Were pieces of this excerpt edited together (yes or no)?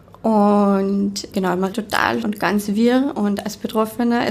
yes